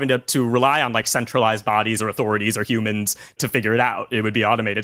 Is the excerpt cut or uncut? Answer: uncut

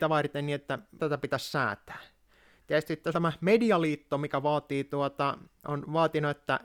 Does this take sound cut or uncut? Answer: cut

